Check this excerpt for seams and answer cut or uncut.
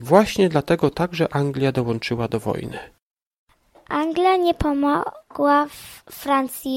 uncut